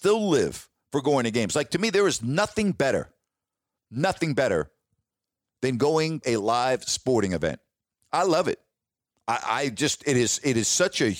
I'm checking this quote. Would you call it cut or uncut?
cut